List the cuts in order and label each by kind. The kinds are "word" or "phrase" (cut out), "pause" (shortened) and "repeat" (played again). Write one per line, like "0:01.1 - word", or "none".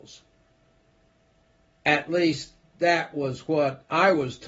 none